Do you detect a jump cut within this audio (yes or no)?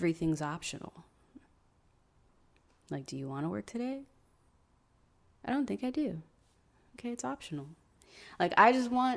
no